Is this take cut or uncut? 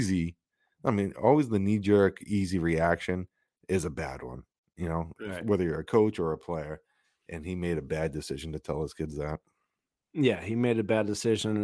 uncut